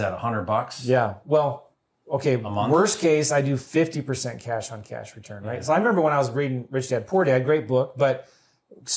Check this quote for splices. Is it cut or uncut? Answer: uncut